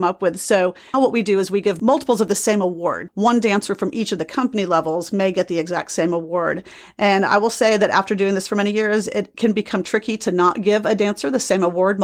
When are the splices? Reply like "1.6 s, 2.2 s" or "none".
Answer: 0.9 s, 3.1 s